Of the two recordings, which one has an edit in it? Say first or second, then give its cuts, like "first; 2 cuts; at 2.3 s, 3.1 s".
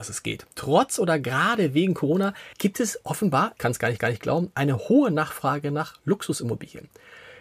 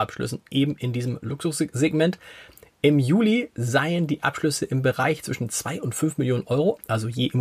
first; 3 cuts; at 2.5 s, 3.6 s, 4.0 s